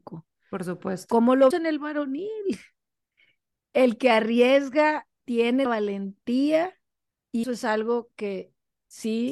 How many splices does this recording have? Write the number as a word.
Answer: four